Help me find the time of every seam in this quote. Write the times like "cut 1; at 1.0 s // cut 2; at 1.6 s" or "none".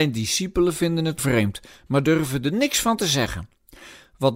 cut 1; at 1.2 s